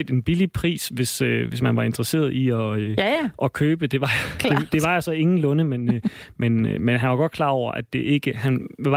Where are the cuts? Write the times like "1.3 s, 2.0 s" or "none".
none